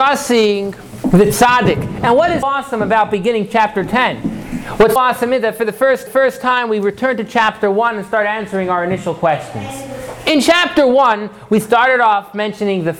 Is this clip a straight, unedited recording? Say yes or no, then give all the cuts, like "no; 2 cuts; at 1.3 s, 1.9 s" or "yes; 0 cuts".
no; 3 cuts; at 2.4 s, 5.0 s, 6.1 s